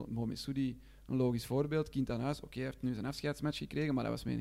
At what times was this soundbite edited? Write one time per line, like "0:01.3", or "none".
none